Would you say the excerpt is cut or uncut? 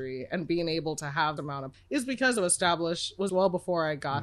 cut